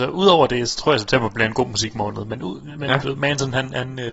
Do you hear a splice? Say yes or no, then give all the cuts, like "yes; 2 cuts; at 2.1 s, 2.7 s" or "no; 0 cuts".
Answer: no; 0 cuts